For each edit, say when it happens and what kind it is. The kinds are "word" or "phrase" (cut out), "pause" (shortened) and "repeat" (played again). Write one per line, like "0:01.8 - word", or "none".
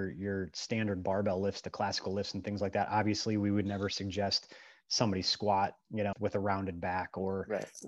0:06.1 - word